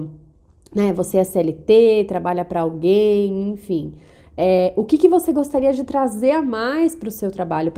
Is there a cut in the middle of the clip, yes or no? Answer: no